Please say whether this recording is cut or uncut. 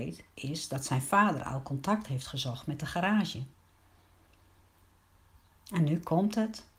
uncut